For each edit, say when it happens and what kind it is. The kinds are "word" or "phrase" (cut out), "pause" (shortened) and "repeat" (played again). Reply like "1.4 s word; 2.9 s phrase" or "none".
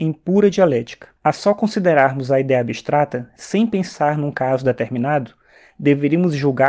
1.2 s pause